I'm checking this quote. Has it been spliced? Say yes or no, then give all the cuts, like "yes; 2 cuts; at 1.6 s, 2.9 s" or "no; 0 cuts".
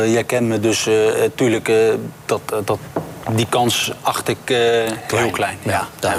no; 0 cuts